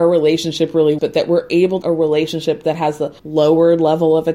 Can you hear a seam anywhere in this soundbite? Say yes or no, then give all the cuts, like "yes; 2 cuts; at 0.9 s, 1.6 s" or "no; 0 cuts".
yes; 3 cuts; at 1.0 s, 1.8 s, 3.2 s